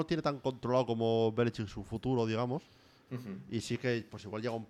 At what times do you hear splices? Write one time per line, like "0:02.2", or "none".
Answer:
none